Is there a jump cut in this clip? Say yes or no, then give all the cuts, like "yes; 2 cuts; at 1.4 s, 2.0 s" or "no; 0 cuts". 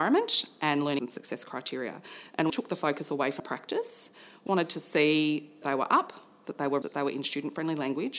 yes; 6 cuts; at 1.0 s, 2.5 s, 3.4 s, 4.5 s, 5.6 s, 6.8 s